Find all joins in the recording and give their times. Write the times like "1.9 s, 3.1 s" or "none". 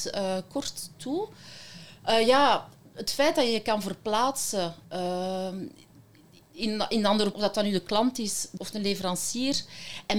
4.8 s, 7.3 s, 8.6 s